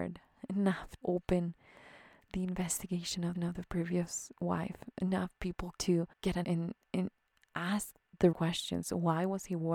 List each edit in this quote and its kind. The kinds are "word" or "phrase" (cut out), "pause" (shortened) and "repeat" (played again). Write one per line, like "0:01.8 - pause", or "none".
0:01.0 - word
0:03.3 - repeat
0:05.8 - word
0:06.1 - pause
0:06.4 - word
0:06.9 - word
0:08.3 - word